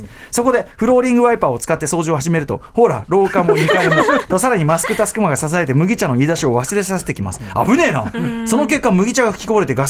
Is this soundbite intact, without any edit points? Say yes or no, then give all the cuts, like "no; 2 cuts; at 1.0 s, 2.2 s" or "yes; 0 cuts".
yes; 0 cuts